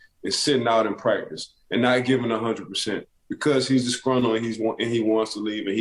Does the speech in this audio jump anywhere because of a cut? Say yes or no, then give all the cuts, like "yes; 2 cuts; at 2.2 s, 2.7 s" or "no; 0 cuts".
no; 0 cuts